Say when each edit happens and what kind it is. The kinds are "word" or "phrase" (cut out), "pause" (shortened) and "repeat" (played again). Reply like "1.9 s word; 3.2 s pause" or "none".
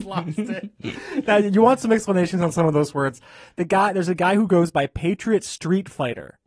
none